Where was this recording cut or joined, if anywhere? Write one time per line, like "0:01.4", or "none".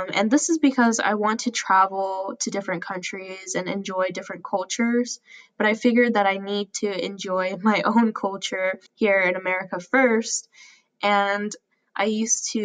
0:08.9